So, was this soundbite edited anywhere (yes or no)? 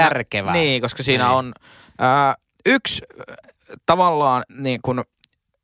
yes